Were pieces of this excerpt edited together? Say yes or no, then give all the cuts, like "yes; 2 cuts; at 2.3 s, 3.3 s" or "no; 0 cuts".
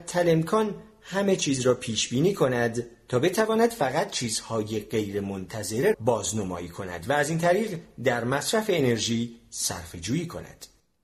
yes; 1 cut; at 5.9 s